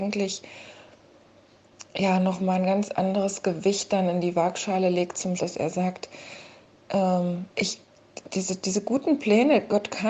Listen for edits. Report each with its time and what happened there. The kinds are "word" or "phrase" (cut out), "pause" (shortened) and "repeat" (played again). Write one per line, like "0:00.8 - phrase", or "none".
0:05.4 - word
0:07.5 - pause